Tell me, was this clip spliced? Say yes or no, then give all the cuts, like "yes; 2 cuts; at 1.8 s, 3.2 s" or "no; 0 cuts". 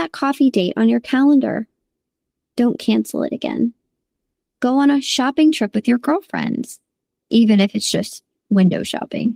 no; 0 cuts